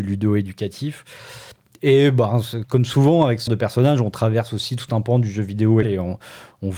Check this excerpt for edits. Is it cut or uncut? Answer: cut